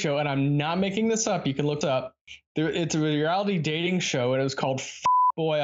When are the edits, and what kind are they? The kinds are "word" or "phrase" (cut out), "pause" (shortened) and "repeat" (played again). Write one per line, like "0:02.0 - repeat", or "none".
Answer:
0:01.8 - word